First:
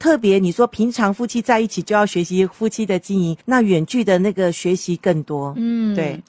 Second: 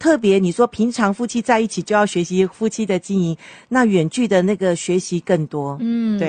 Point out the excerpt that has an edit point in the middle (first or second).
first